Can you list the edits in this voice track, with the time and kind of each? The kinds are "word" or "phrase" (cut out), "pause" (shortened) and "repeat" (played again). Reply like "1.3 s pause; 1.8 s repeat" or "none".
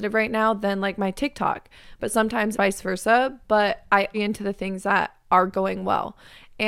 2.5 s word; 4.1 s phrase